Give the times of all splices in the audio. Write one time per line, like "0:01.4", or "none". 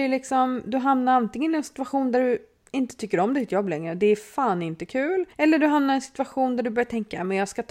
0:05.3

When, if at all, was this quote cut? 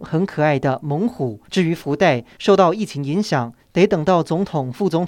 0:01.4

